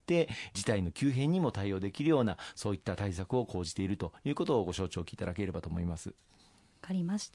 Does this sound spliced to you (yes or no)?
no